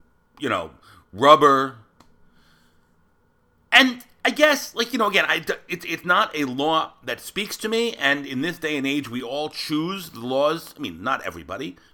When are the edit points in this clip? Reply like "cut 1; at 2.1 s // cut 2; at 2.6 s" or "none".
none